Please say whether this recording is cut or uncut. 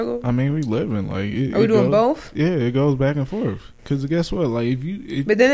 uncut